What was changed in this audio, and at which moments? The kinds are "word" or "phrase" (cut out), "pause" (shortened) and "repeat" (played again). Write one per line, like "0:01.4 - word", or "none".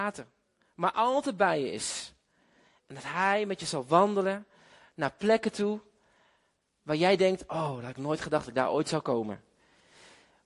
none